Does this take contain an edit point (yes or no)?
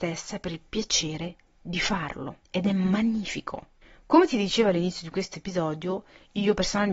yes